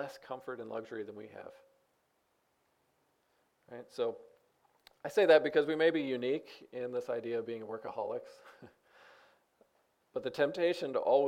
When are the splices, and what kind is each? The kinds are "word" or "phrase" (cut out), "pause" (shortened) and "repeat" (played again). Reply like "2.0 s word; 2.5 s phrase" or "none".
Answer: none